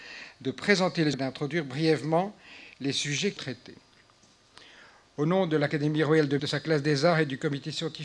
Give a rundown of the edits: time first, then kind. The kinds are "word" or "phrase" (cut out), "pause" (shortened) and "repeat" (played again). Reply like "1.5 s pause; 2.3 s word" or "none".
1.1 s word; 3.4 s word; 6.4 s word